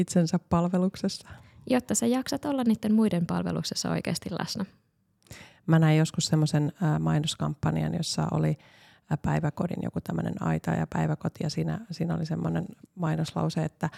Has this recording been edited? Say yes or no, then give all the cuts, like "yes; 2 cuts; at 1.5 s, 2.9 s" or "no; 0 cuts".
no; 0 cuts